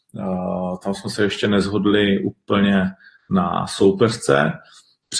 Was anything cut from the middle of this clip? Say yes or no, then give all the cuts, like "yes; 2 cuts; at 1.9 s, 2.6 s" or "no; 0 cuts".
no; 0 cuts